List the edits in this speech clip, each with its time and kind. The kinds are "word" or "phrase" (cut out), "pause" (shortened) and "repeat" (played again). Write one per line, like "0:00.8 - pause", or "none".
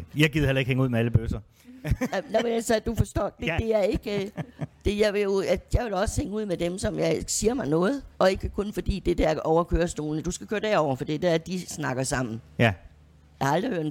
0:08.1 - pause